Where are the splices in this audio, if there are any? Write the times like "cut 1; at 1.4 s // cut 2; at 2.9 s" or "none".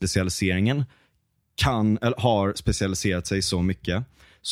none